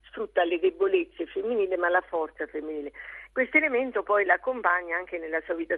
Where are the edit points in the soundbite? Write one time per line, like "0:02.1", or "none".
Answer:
none